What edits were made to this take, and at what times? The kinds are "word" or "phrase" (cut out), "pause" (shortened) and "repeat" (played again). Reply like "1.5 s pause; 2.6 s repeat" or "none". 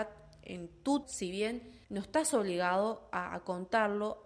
1.0 s word; 1.8 s pause